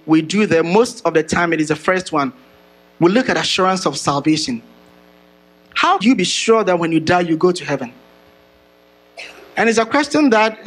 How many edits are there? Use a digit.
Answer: 1